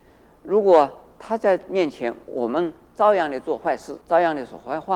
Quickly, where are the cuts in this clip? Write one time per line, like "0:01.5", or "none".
0:04.0